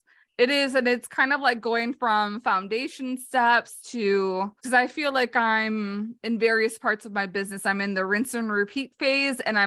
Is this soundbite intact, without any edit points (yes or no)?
no